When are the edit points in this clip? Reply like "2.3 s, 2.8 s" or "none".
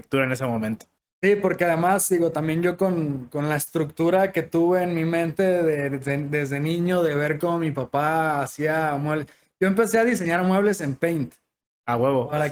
none